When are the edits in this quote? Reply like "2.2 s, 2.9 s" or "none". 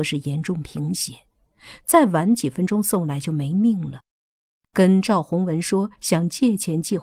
none